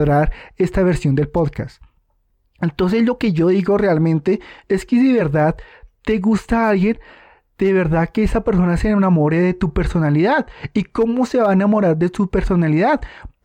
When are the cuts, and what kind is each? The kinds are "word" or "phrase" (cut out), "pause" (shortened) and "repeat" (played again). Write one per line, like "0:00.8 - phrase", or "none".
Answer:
none